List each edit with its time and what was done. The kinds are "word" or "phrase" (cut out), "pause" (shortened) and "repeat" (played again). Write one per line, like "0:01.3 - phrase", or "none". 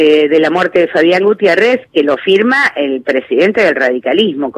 none

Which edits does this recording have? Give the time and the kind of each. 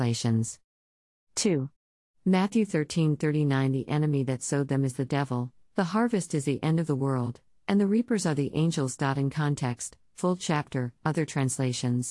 none

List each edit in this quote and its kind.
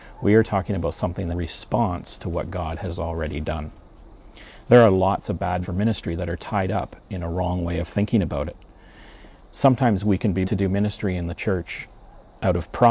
0:01.3 - phrase
0:05.6 - word
0:09.4 - pause
0:10.4 - word

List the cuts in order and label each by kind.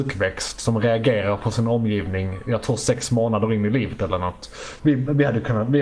0:04.8 - phrase

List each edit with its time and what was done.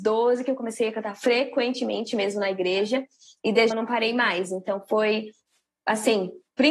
0:03.7 - word

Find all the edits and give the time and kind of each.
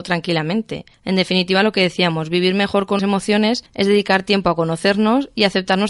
0:00.9 - pause
0:03.0 - word
0:03.7 - pause

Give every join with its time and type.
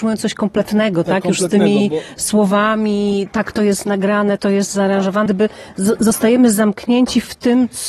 0:04.4 - word
0:05.3 - word

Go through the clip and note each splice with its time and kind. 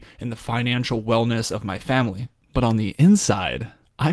none

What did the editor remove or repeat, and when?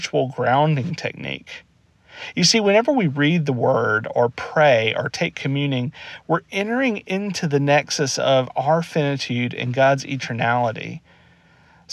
none

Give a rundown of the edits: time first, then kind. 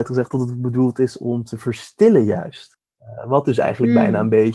0:02.9 - pause

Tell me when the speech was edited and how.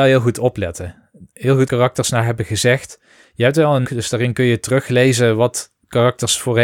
0:01.7 - phrase
0:03.8 - word

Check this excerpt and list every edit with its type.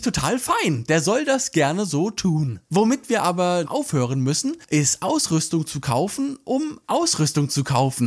0:02.6 - pause
0:03.6 - word

